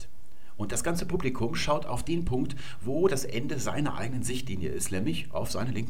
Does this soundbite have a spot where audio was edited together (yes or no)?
no